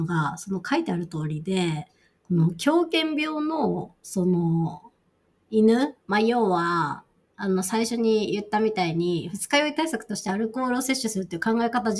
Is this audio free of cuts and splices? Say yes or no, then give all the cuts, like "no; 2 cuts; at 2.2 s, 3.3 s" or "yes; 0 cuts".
no; 1 cut; at 6.0 s